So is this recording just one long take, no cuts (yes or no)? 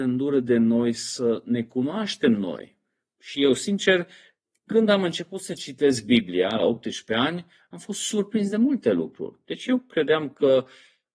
yes